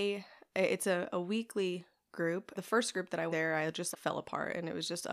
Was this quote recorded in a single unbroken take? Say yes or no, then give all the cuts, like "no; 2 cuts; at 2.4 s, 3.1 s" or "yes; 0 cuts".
no; 3 cuts; at 2.6 s, 3.3 s, 3.9 s